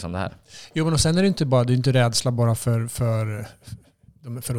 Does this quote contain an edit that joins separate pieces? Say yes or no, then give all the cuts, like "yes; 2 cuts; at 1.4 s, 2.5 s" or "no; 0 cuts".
no; 0 cuts